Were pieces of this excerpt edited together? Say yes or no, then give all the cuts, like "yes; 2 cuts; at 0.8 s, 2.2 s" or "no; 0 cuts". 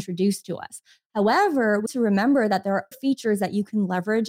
yes; 2 cuts; at 1.9 s, 2.9 s